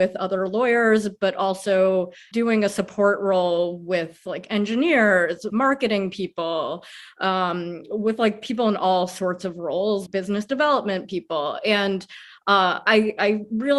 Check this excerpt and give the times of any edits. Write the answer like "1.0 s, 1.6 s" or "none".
2.3 s, 5.5 s, 10.1 s